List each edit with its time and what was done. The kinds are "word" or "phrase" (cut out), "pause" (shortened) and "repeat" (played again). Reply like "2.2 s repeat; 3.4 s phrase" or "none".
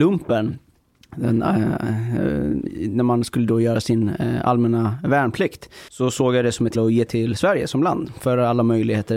5.9 s pause; 6.7 s word; 7.1 s word